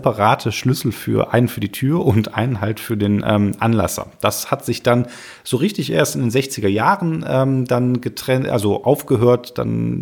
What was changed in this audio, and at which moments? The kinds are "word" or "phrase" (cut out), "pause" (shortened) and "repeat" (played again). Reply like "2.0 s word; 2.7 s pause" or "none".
none